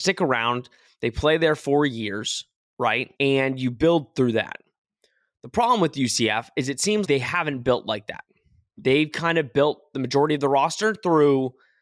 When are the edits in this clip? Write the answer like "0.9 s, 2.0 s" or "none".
3.2 s, 7.0 s